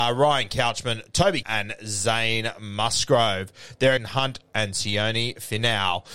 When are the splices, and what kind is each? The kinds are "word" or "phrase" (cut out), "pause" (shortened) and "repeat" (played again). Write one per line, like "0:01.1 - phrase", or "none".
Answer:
0:01.4 - word
0:04.0 - phrase

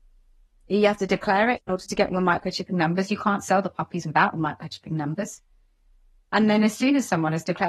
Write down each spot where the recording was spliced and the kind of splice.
none

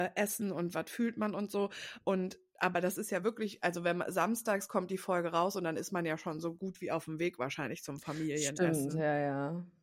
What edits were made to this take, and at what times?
none

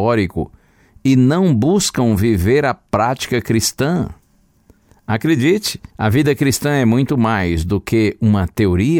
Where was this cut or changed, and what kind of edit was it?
0:05.9 - pause

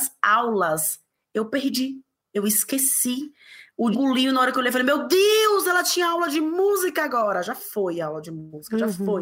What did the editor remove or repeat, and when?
0:03.9 - word

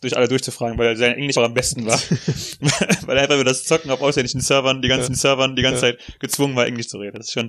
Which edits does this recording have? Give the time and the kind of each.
0:01.4 - word
0:05.1 - repeat

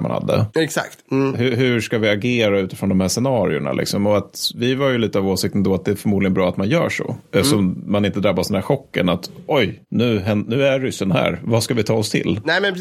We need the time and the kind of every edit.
none

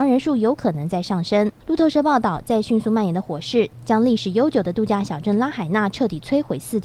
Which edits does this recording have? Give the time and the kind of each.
0:01.6 - pause

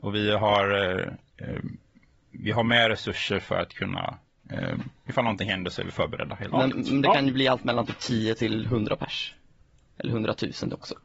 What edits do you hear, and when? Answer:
none

